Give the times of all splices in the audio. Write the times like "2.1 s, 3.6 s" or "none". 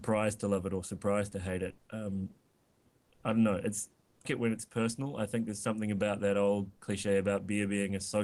1.8 s, 4.2 s, 6.8 s